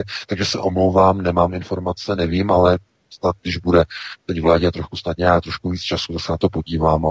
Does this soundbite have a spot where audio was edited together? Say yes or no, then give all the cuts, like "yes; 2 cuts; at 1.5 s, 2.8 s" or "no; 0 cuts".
no; 0 cuts